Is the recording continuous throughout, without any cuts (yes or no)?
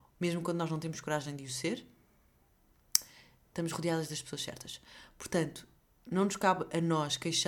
yes